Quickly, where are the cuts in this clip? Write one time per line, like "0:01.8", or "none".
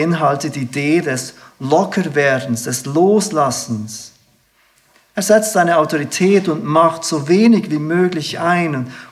none